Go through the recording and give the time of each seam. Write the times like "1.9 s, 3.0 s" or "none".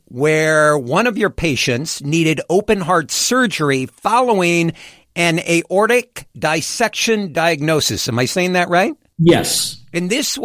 none